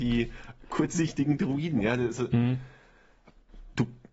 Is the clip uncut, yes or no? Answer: yes